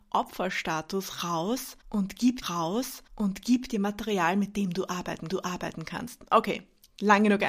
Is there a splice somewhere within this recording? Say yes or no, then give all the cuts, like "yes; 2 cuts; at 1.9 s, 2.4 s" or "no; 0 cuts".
yes; 2 cuts; at 2.4 s, 5.3 s